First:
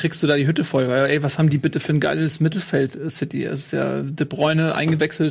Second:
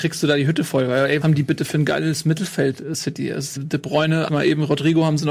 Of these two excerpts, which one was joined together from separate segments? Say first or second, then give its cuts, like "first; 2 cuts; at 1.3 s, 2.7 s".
second; 3 cuts; at 1.2 s, 3.6 s, 4.3 s